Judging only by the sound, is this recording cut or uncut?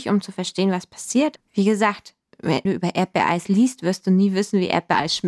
cut